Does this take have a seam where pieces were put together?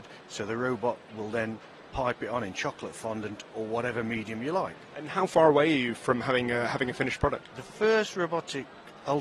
no; 0 cuts

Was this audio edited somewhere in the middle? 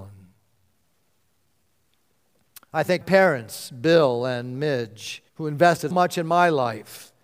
yes; 3 cuts; at 3.0 s, 5.3 s, 5.9 s

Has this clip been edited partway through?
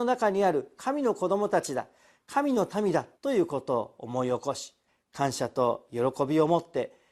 yes; 2 cuts; at 3.2 s, 4.9 s

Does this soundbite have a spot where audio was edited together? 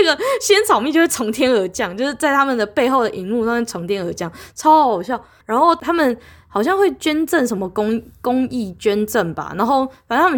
no; 0 cuts

